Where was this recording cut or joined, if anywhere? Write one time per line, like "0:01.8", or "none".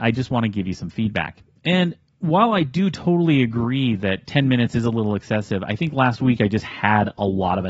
none